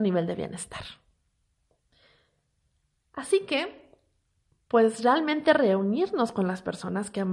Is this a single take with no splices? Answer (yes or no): yes